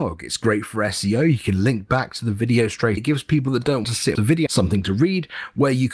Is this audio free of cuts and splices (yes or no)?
no